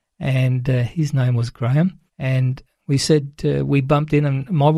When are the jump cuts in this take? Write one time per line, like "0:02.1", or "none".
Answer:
0:02.1

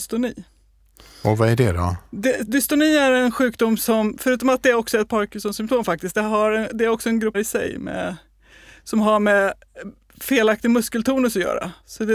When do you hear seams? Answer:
0:07.3

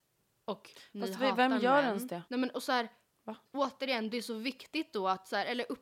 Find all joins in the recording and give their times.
0:02.3
0:03.5

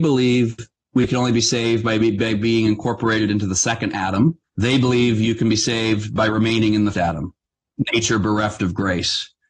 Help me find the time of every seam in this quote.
0:04.4
0:06.9

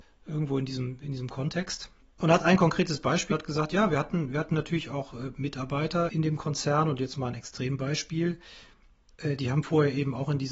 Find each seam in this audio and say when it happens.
0:03.3

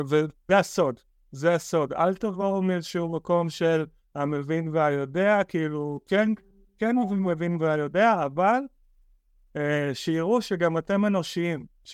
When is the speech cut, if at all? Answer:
none

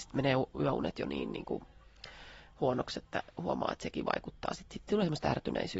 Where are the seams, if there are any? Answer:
none

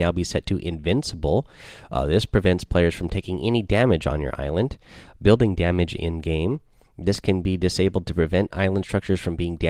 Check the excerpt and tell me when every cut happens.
none

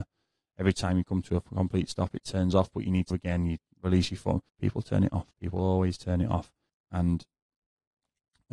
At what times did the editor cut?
0:03.1
0:04.5
0:05.3
0:06.7

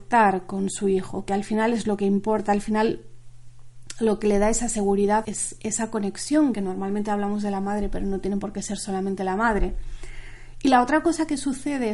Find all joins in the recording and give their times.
0:05.2
0:06.5

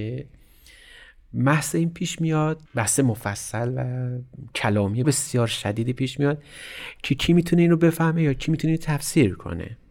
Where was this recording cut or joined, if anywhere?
0:02.7
0:05.0

